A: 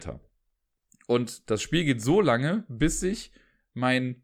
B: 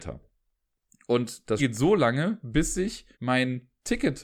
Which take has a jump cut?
B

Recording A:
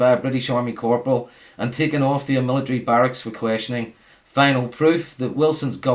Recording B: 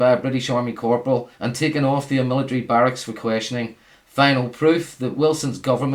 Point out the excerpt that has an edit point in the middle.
B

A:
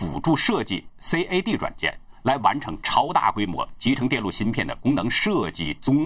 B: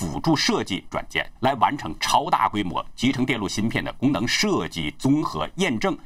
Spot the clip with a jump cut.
B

